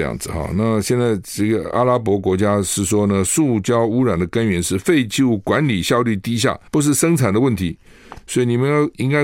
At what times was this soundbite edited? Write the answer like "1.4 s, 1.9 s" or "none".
6.7 s